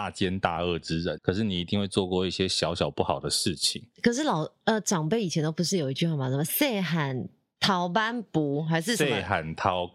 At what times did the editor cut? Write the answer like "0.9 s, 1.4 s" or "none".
1.2 s